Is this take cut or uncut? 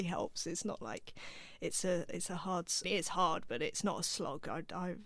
cut